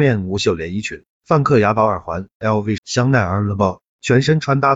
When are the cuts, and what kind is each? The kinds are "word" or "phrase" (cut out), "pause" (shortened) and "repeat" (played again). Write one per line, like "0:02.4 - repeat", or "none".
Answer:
0:02.8 - phrase